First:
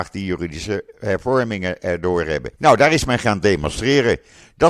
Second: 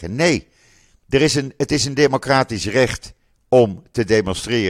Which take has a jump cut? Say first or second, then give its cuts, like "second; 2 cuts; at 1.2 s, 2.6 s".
first; 1 cut; at 2.6 s